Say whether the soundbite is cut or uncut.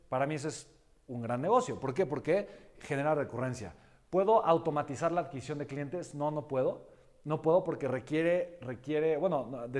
uncut